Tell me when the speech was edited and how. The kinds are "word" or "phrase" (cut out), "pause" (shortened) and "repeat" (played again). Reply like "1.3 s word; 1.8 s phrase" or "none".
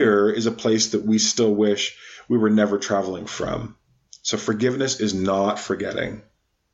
none